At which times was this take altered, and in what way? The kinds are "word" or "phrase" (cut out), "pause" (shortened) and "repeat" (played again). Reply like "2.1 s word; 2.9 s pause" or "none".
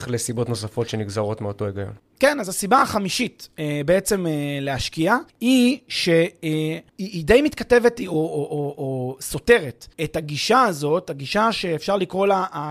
5.3 s pause; 6.9 s pause; 9.9 s pause